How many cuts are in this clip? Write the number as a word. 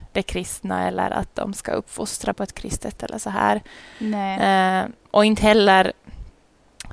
two